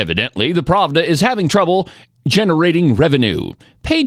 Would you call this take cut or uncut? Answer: uncut